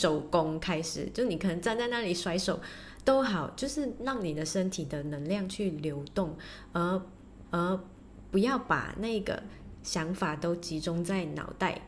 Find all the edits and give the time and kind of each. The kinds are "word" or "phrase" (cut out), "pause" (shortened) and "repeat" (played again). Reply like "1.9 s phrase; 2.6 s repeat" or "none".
7.4 s repeat